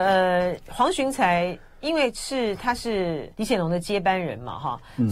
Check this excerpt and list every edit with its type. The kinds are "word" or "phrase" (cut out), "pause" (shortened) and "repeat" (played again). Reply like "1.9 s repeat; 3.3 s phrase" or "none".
3.3 s pause

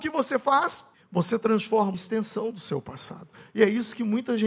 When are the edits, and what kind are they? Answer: 0.9 s pause; 1.9 s phrase

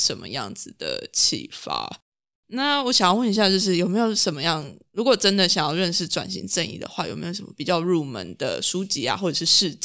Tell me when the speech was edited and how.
none

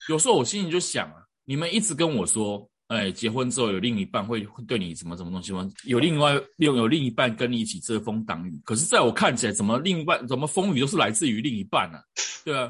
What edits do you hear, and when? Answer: none

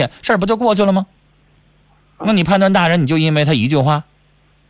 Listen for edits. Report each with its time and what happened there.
none

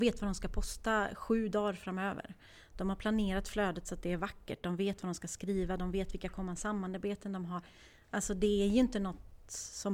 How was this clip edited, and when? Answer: none

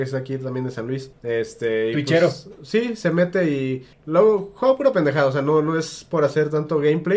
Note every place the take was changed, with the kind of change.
1.1 s pause; 3.9 s pause

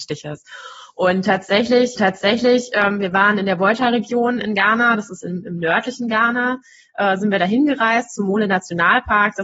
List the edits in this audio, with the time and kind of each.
2.0 s repeat

